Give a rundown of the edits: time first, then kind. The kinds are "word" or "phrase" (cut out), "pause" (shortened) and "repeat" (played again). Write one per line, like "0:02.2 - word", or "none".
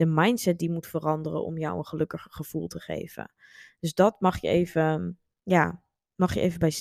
none